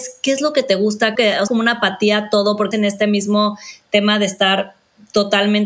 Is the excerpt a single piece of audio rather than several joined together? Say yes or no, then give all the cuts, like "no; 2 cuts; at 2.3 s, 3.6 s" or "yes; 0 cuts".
no; 3 cuts; at 1.2 s, 1.5 s, 2.7 s